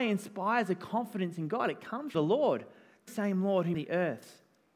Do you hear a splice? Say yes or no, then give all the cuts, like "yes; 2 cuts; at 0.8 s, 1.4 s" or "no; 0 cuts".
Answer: yes; 3 cuts; at 2.1 s, 3.1 s, 3.7 s